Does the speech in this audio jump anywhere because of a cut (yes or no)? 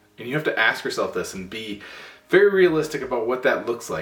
no